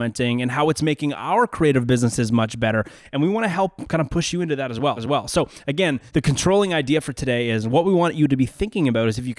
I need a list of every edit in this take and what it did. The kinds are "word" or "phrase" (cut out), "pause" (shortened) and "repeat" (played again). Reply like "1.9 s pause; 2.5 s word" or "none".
5.0 s repeat; 6.1 s pause